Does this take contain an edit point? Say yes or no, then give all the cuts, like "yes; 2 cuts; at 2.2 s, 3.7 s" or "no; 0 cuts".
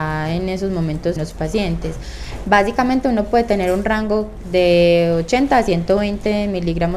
yes; 1 cut; at 1.2 s